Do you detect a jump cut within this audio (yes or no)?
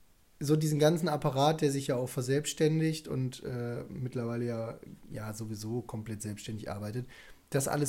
no